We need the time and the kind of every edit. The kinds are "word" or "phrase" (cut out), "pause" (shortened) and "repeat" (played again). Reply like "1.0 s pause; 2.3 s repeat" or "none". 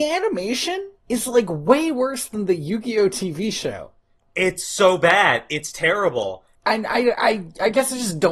1.0 s pause